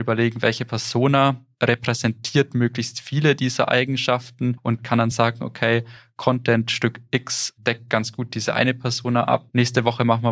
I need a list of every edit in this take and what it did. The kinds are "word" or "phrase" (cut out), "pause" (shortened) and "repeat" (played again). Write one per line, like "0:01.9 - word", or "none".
none